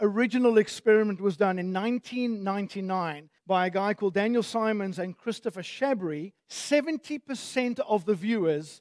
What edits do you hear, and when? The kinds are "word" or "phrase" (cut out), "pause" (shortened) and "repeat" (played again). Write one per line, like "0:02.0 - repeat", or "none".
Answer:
0:03.4 - pause
0:06.4 - pause